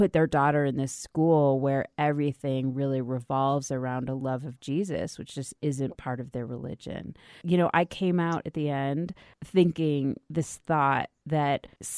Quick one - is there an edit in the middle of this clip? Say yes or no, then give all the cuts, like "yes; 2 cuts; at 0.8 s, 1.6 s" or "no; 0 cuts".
no; 0 cuts